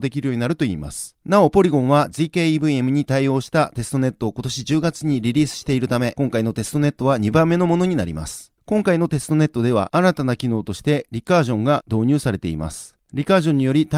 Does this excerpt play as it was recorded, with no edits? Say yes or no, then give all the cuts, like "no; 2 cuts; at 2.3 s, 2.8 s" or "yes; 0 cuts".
yes; 0 cuts